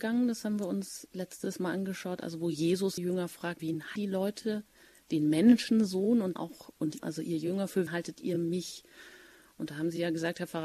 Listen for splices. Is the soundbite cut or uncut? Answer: cut